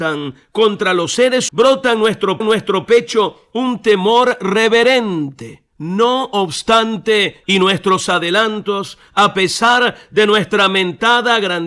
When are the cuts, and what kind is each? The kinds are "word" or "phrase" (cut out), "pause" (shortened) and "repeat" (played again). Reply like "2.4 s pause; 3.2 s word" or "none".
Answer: 1.5 s word; 2.4 s repeat; 5.7 s pause; 7.4 s phrase

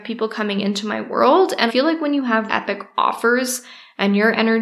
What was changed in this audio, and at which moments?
1.7 s word; 2.5 s word

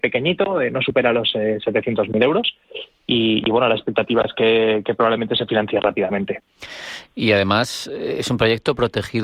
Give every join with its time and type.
none

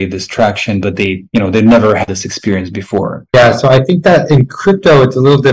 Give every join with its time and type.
2.1 s word

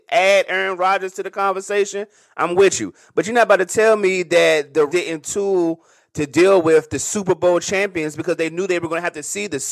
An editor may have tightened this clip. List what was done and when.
4.9 s word

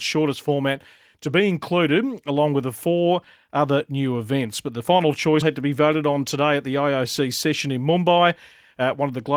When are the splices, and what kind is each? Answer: 5.4 s word

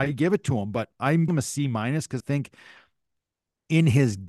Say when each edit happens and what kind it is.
1.3 s word; 2.2 s word

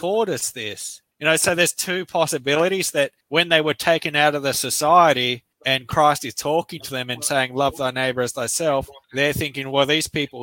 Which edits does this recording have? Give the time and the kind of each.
1.1 s pause; 3.2 s pause; 5.5 s pause; 9.0 s pause

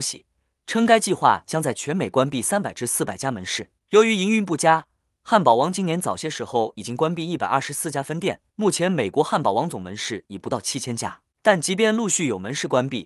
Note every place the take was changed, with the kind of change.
3.8 s pause; 8.5 s pause; 11.3 s pause

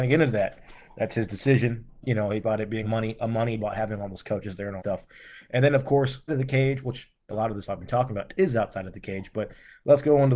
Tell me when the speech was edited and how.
2.4 s word; 2.8 s word; 3.6 s word; 4.8 s word; 6.3 s word; 7.3 s word; 7.7 s word

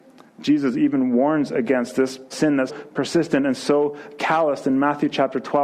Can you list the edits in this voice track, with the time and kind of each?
2.3 s phrase; 2.7 s word

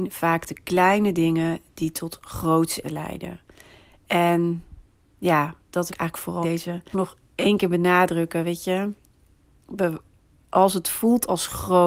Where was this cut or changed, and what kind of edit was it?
2.8 s word; 5.9 s word; 6.4 s word; 6.9 s word

